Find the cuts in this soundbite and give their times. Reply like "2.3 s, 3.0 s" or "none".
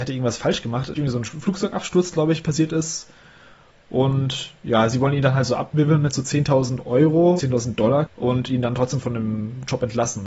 0.9 s, 7.4 s, 9.0 s